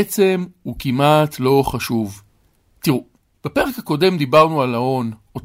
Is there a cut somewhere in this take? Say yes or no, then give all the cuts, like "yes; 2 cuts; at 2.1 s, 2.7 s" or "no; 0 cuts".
no; 0 cuts